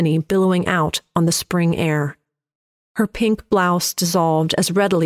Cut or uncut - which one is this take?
uncut